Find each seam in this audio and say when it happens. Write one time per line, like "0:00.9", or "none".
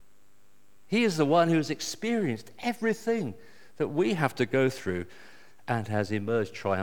none